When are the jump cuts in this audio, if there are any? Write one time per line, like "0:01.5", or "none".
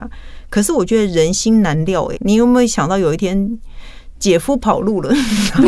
0:02.2